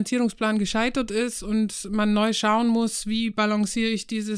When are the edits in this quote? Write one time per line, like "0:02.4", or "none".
none

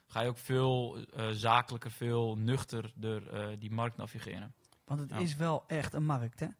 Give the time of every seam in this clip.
none

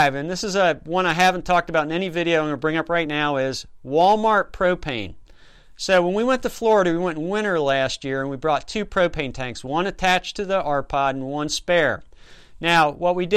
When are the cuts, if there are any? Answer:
none

